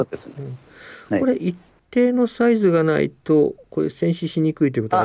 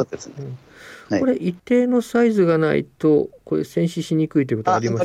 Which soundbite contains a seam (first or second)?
second